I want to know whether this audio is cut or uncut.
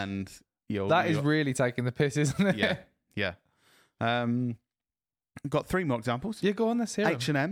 uncut